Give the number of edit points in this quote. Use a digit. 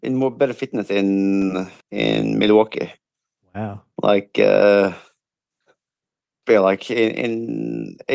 2